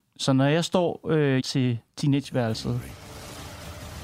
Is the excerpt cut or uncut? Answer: cut